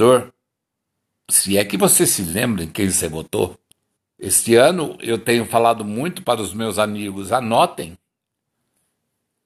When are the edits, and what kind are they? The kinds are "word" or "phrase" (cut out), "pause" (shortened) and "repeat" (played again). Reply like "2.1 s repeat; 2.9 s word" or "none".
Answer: 4.0 s pause